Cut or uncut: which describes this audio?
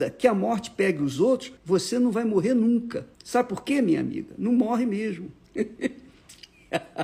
cut